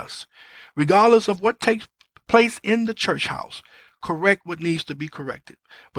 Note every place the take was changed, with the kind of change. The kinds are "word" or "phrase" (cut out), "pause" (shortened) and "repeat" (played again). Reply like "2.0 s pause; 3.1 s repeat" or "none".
none